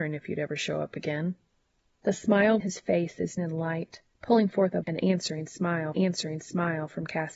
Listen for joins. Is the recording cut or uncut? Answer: cut